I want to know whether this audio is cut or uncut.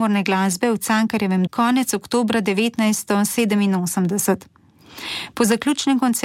cut